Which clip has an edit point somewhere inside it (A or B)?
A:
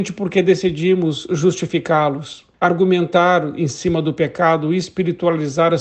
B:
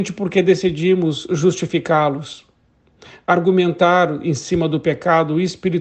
A